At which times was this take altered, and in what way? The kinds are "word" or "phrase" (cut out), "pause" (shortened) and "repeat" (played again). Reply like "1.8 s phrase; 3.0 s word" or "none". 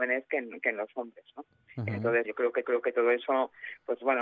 2.2 s word; 2.6 s repeat